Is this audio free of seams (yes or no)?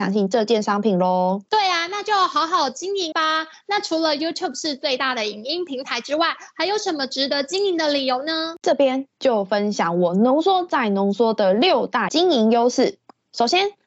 no